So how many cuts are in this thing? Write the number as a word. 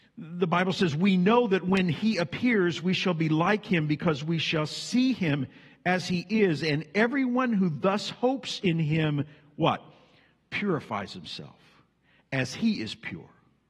zero